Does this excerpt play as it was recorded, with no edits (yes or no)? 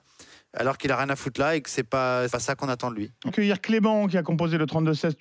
no